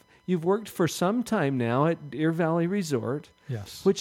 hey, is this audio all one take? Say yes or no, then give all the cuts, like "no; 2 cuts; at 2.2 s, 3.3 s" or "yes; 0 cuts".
yes; 0 cuts